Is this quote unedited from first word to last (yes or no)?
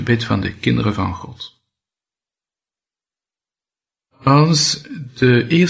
yes